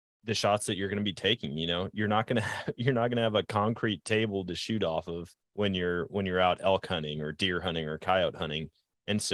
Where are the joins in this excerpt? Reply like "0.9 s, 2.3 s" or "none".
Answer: 5.4 s